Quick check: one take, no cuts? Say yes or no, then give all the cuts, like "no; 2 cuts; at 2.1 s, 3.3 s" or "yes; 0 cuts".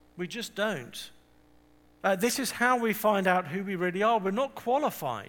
no; 1 cut; at 1.4 s